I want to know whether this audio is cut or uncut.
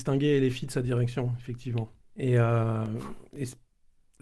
cut